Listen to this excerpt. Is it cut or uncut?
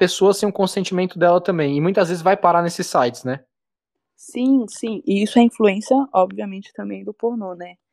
uncut